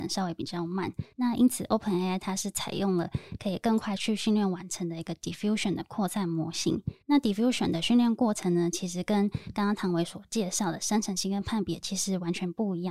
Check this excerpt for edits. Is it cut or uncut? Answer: cut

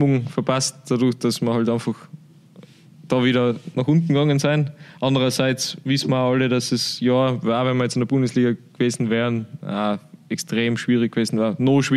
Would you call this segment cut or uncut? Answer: uncut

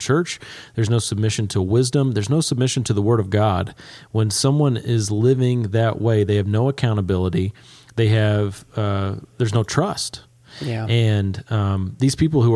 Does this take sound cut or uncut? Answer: uncut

